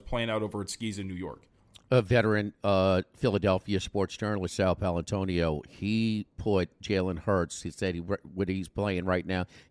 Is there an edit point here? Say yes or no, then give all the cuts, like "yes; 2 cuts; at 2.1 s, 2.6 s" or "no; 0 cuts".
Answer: no; 0 cuts